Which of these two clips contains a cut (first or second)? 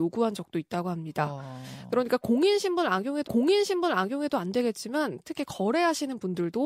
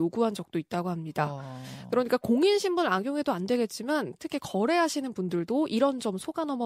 first